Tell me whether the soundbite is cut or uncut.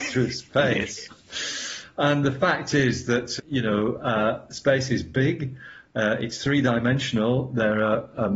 cut